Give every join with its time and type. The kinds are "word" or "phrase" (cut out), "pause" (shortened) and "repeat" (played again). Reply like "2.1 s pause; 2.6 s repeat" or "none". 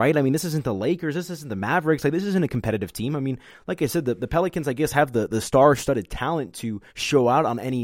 6.9 s pause